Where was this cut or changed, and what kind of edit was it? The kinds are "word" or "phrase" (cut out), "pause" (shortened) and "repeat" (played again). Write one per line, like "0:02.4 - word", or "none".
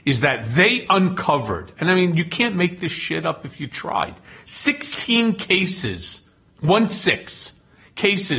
none